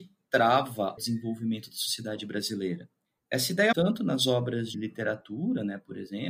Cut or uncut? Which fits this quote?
cut